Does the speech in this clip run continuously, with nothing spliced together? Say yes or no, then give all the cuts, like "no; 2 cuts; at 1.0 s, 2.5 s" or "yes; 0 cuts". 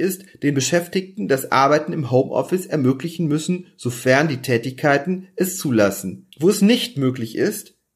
no; 1 cut; at 6.3 s